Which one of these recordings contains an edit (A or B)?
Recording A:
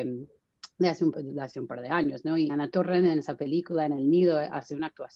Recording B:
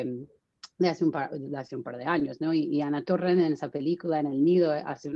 A